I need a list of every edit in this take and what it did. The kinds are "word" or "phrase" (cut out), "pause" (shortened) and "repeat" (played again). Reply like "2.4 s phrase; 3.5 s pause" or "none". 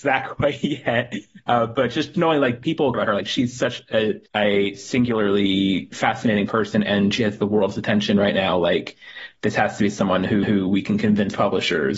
2.1 s word; 2.9 s word; 4.3 s pause; 10.4 s repeat